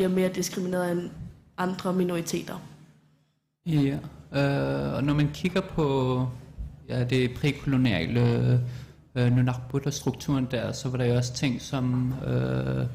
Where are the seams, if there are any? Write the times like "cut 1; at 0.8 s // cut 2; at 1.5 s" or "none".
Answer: none